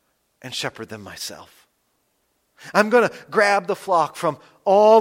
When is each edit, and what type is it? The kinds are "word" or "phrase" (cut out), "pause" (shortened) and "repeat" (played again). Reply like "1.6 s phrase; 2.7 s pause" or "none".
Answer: none